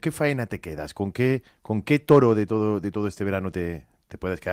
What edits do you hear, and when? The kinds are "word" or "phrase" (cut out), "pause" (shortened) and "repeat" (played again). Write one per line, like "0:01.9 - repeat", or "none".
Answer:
none